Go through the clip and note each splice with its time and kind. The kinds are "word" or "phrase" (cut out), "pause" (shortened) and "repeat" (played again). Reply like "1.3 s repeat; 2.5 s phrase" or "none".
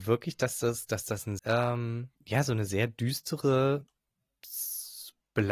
1.4 s word; 2.2 s pause